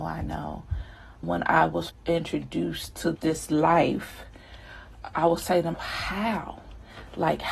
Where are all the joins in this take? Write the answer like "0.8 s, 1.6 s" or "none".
1.2 s, 1.9 s, 3.1 s, 5.1 s, 5.7 s